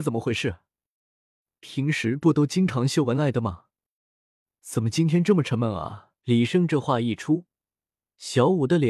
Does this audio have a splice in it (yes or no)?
yes